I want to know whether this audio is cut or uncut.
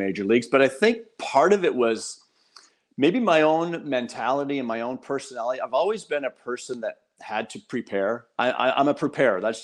uncut